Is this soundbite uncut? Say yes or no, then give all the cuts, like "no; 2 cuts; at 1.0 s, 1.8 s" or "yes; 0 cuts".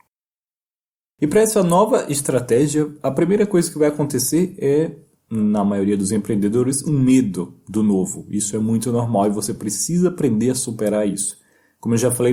yes; 0 cuts